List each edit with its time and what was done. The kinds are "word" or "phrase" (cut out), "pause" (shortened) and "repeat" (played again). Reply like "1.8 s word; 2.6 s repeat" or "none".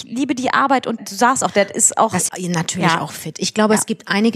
1.0 s word; 2.3 s word

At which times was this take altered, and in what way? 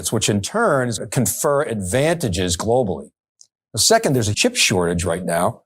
1.0 s word; 4.3 s word

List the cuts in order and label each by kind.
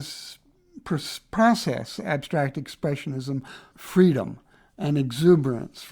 3.7 s word

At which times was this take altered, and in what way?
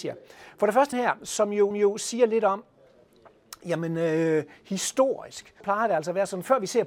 0.9 s word; 1.7 s repeat; 5.6 s word

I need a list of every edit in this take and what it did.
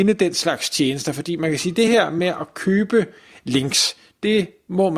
none

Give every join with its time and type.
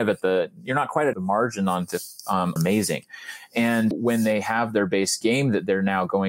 1.1 s phrase; 2.6 s phrase; 3.9 s word

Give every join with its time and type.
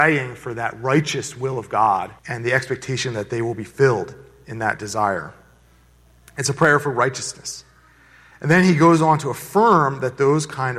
2.2 s pause

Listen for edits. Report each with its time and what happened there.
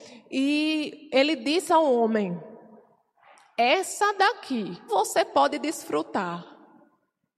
1.7 s word; 4.9 s word

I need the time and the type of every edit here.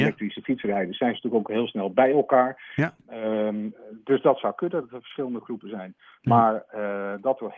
none

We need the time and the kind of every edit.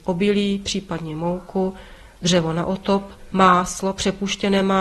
none

